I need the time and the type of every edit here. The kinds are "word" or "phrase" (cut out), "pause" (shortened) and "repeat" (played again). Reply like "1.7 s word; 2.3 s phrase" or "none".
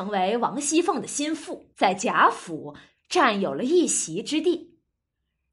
1.7 s pause

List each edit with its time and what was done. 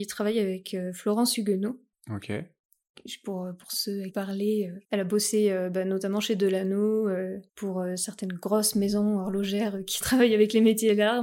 1.9 s pause; 4.1 s phrase; 4.8 s pause; 7.5 s pause

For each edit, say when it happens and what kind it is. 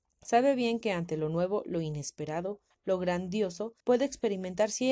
3.8 s pause

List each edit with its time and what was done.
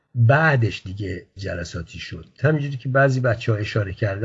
1.4 s word

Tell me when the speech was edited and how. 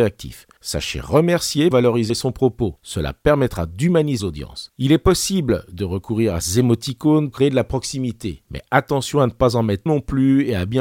1.7 s word; 2.1 s word; 4.2 s phrase; 6.4 s word; 7.3 s word; 9.9 s word

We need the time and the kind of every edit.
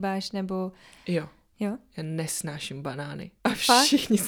3.4 s pause

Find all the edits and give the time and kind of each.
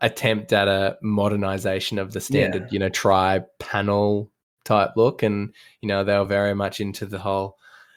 none

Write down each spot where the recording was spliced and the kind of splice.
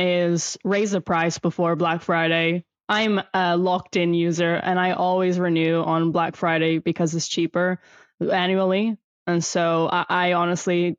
none

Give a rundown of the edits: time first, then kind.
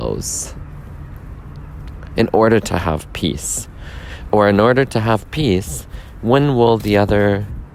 none

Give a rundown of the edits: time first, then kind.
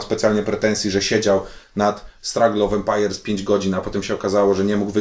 none

